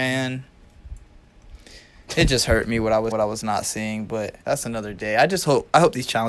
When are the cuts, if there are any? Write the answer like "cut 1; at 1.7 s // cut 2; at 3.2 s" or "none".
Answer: cut 1; at 3.1 s // cut 2; at 4.4 s